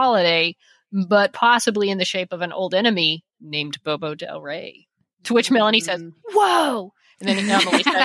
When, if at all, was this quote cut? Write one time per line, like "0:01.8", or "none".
none